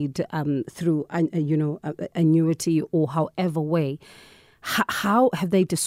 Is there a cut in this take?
no; 0 cuts

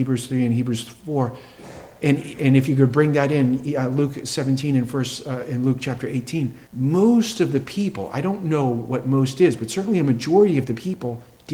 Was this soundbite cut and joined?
yes; 1 cut; at 6.7 s

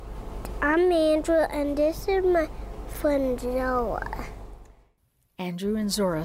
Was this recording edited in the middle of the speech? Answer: no; 0 cuts

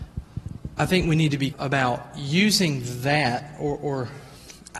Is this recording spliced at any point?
yes; 1 cut; at 1.5 s

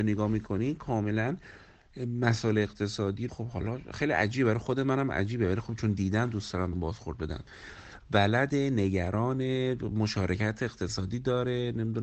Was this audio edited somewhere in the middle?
yes; 2 cuts; at 3.3 s, 6.7 s

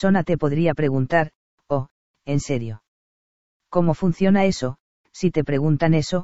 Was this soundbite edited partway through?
no; 0 cuts

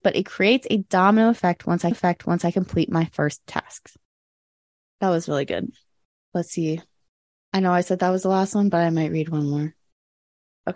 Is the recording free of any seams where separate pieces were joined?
no; 1 cut; at 1.9 s

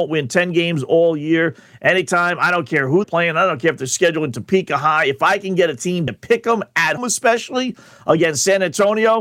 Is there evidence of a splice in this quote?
yes; 3 cuts; at 3.0 s, 6.1 s, 7.0 s

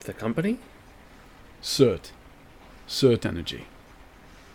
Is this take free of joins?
yes; 0 cuts

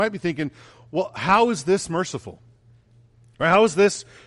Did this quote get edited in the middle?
no; 0 cuts

